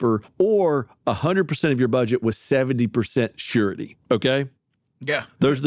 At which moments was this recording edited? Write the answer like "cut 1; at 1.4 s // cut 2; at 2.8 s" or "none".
cut 1; at 4.0 s